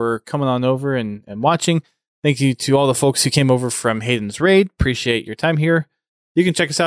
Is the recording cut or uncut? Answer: uncut